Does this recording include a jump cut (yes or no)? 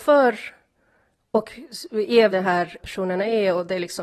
yes